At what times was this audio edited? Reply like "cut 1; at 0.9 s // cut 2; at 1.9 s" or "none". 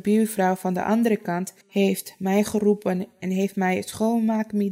cut 1; at 1.6 s